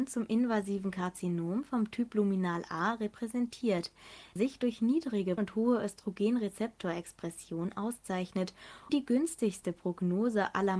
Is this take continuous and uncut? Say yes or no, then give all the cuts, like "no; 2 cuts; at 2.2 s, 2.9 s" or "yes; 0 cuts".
no; 3 cuts; at 4.4 s, 5.4 s, 8.9 s